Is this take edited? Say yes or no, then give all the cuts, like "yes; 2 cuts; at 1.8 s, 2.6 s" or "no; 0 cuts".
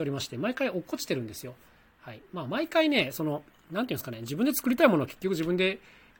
no; 0 cuts